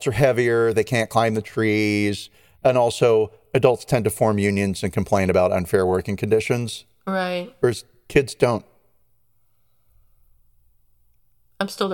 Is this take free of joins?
yes; 0 cuts

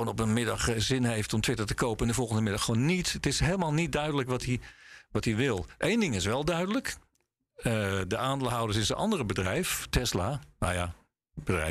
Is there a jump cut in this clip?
no; 0 cuts

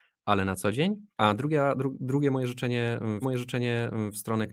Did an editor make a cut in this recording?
yes; 2 cuts; at 1.1 s, 3.2 s

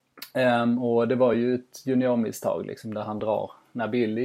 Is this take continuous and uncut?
yes; 0 cuts

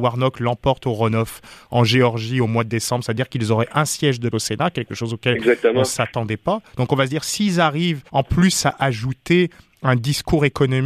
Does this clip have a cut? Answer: yes; 2 cuts; at 4.3 s, 8.1 s

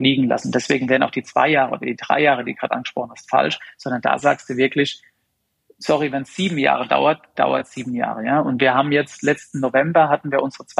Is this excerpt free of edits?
yes; 0 cuts

